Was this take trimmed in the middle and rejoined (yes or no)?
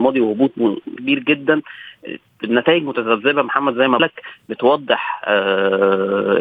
yes